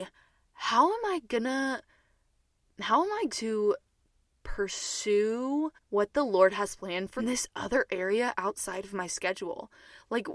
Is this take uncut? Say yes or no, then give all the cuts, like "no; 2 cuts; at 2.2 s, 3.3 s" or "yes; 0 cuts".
no; 3 cuts; at 3.3 s, 5.8 s, 7.2 s